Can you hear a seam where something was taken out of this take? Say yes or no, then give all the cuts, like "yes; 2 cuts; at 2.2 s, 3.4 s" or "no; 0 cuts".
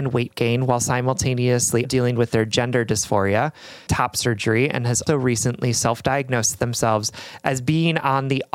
yes; 3 cuts; at 1.8 s, 3.9 s, 5.1 s